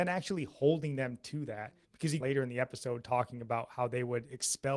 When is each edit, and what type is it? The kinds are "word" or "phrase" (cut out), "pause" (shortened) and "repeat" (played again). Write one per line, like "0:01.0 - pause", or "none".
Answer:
0:01.8 - pause
0:02.2 - phrase